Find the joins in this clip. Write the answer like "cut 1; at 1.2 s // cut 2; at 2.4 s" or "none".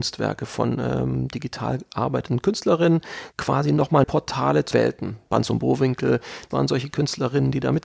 cut 1; at 3.3 s // cut 2; at 4.0 s // cut 3; at 4.7 s // cut 4; at 6.5 s